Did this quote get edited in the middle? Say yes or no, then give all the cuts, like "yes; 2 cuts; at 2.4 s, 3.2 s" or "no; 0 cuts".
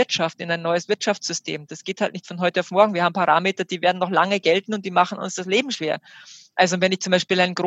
no; 0 cuts